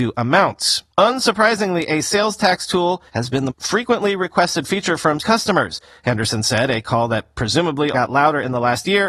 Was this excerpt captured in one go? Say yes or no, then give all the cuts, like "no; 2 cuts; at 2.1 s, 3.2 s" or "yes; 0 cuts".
no; 5 cuts; at 0.9 s, 3.1 s, 3.5 s, 5.2 s, 7.9 s